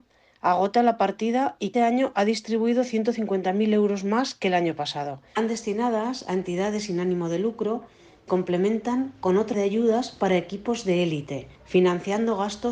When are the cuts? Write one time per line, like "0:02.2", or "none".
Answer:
0:01.7
0:08.3
0:09.5
0:11.6